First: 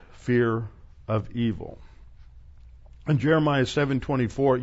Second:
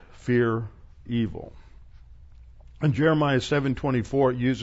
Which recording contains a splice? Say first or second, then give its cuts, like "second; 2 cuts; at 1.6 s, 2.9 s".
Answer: second; 1 cut; at 1.1 s